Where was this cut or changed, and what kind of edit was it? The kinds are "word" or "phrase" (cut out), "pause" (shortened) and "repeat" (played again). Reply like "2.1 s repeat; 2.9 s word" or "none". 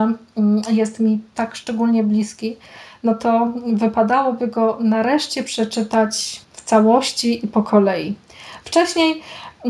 6.4 s pause